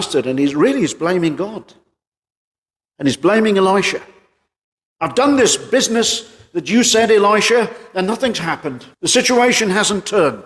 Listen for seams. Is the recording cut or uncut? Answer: cut